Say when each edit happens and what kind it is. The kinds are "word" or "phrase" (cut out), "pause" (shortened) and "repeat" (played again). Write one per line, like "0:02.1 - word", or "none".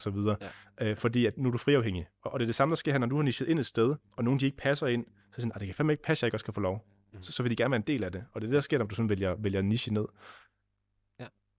none